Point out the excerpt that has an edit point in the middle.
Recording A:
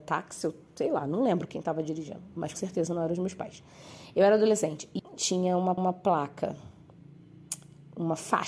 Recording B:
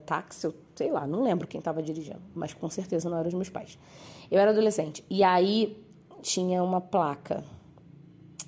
A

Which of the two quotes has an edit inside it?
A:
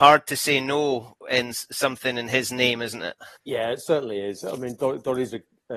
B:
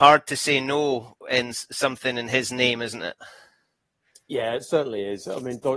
A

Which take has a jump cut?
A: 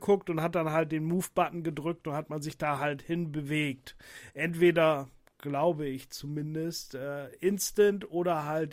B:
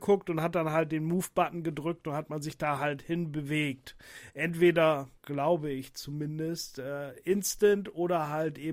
B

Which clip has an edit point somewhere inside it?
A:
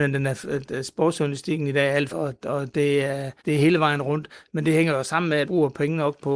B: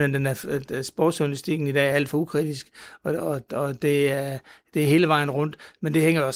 A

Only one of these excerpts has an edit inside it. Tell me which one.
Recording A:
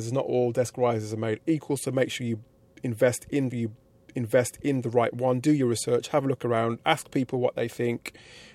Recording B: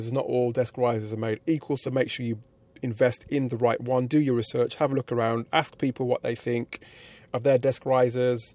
A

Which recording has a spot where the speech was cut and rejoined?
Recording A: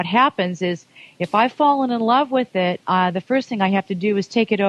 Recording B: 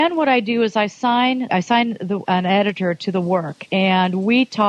B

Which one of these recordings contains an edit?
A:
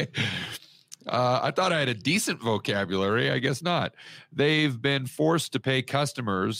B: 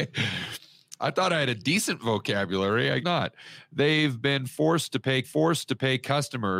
B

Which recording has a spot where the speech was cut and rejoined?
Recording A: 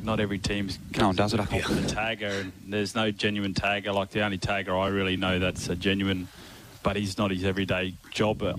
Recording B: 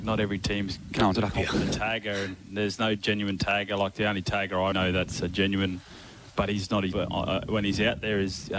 B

